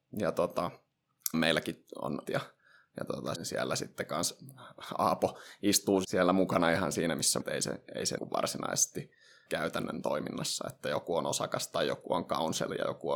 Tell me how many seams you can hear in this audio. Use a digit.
7